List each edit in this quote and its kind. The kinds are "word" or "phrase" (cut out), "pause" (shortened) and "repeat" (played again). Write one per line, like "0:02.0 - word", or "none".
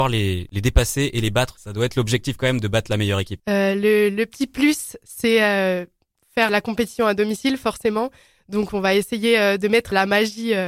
none